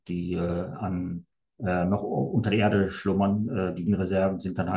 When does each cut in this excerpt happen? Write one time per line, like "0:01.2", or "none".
0:01.3
0:03.9